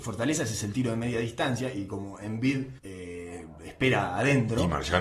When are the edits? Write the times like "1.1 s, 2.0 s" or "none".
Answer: 2.8 s